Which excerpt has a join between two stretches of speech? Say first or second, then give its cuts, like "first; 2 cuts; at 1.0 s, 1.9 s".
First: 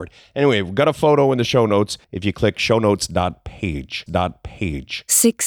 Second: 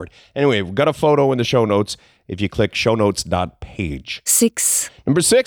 first; 2 cuts; at 2.0 s, 4.1 s